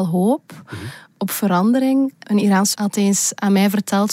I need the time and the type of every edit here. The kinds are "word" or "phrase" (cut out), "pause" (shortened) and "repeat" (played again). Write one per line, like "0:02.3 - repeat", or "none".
0:02.7 - word